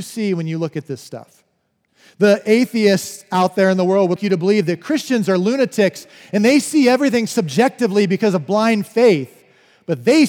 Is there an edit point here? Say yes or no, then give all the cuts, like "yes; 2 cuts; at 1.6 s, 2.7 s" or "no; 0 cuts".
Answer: yes; 2 cuts; at 1.9 s, 4.2 s